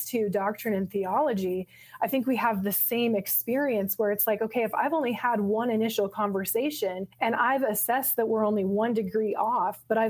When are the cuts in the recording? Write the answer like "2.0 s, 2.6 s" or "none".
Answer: 7.1 s